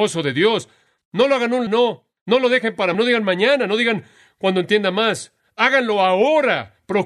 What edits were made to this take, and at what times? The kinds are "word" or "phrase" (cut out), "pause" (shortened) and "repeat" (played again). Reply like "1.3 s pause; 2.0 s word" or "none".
1.7 s word; 2.9 s word